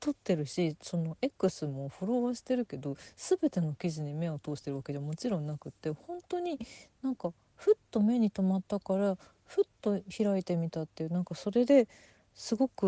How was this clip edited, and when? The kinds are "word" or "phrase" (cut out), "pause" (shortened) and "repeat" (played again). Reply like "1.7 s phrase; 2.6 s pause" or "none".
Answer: none

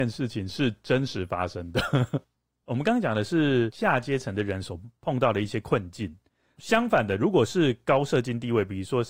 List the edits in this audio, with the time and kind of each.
none

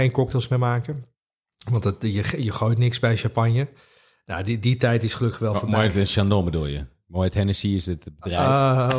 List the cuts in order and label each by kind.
none

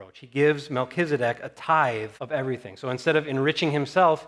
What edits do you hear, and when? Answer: 2.2 s pause

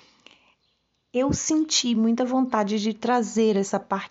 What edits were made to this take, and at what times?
none

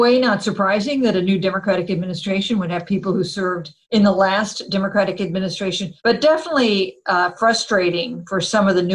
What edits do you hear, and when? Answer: 3.8 s pause; 6.0 s pause

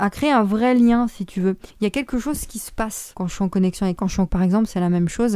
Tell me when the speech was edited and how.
1.7 s pause; 3.1 s word; 4.0 s word; 4.3 s word

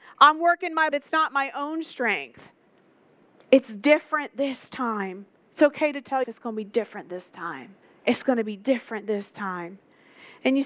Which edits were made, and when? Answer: 0.9 s phrase; 6.2 s word; 7.8 s pause

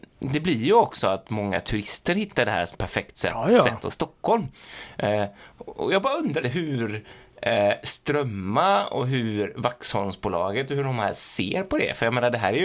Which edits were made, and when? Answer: 2.7 s word; 3.9 s word; 6.4 s word

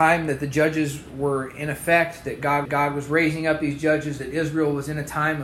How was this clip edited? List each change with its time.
2.7 s repeat

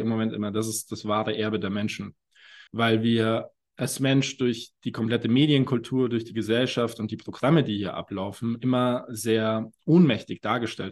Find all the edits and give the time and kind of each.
2.7 s pause; 4.8 s pause

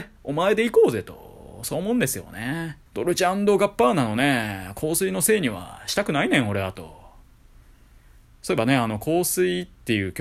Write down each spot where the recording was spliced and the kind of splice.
2.9 s pause

